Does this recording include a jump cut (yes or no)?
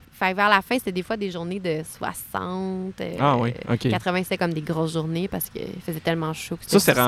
no